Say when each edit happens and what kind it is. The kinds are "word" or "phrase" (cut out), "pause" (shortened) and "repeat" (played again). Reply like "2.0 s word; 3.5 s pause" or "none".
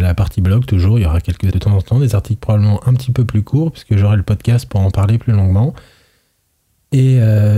1.5 s word